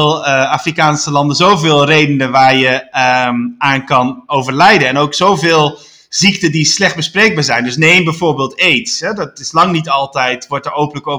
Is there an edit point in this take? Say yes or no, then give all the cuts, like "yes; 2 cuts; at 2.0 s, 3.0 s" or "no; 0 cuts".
no; 0 cuts